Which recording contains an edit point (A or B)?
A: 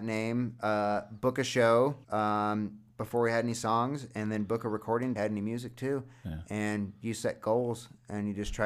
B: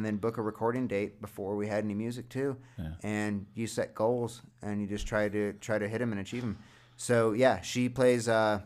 A